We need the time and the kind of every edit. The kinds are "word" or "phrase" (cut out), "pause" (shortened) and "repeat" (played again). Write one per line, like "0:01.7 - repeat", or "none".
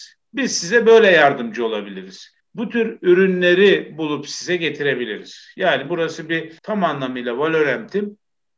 0:02.4 - pause
0:06.6 - pause